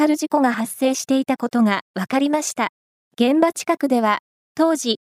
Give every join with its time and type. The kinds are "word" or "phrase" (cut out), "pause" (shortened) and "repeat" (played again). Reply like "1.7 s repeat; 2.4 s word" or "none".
3.0 s pause